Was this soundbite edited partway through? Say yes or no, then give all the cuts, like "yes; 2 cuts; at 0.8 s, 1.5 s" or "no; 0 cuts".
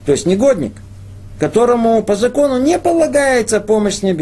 no; 0 cuts